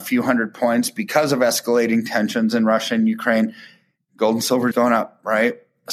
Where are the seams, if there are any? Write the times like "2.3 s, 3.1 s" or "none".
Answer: 4.7 s

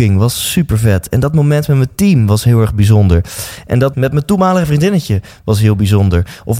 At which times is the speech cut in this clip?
3.9 s

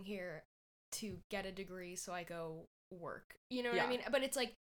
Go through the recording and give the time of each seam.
2.3 s

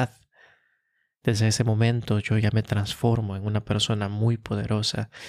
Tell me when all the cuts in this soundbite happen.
none

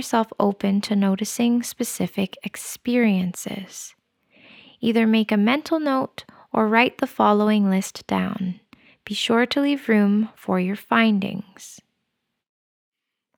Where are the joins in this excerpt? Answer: none

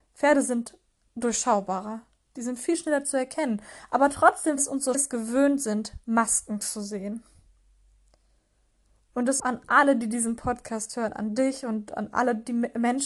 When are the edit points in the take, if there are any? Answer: 4.6 s, 4.9 s, 9.4 s

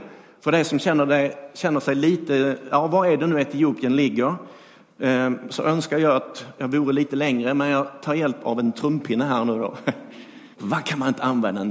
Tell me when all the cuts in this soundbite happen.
10.5 s

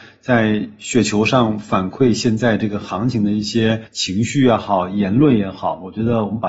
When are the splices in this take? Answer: 3.9 s

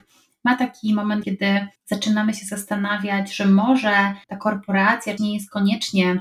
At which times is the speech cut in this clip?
1.2 s, 1.7 s, 4.2 s, 5.2 s

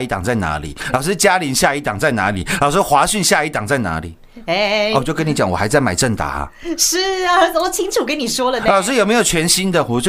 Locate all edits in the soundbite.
none

